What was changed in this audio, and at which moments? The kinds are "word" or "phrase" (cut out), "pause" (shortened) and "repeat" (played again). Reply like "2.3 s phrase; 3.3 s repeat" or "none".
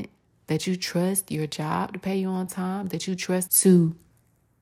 3.5 s phrase